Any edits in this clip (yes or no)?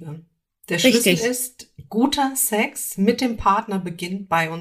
no